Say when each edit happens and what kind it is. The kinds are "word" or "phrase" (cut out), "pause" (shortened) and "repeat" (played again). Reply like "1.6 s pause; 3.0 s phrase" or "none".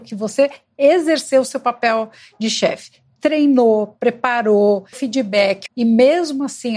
4.9 s word; 5.7 s word

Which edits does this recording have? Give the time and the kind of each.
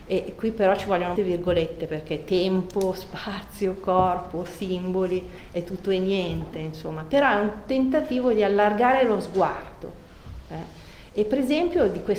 1.2 s word

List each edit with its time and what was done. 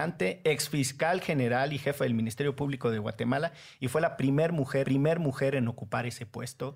4.8 s repeat

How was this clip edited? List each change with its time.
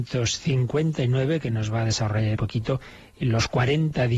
2.4 s word

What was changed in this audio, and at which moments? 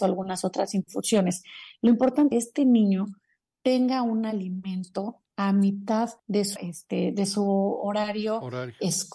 2.3 s phrase; 6.2 s pause; 6.6 s word

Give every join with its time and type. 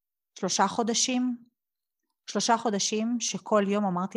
none

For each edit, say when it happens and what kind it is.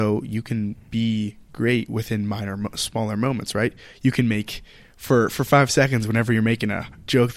none

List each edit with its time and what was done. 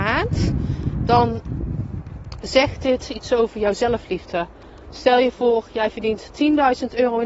none

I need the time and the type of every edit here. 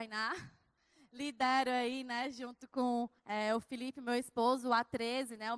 3.2 s pause

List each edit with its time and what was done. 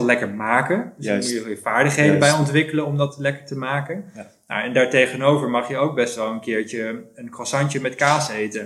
none

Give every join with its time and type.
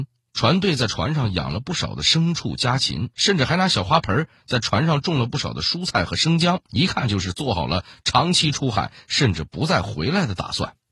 3.1 s pause; 6.7 s pause

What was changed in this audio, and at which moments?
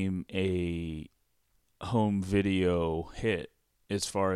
none

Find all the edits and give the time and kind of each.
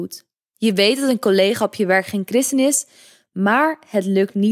none

